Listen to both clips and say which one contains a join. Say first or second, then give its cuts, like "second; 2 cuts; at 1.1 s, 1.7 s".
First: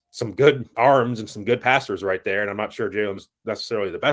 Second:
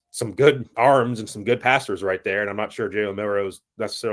first; 1 cut; at 3.2 s